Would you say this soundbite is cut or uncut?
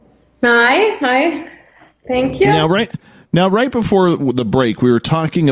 uncut